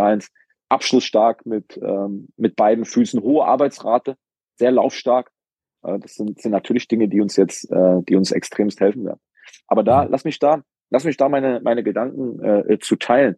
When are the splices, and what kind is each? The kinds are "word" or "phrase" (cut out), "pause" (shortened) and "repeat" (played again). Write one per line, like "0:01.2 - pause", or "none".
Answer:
none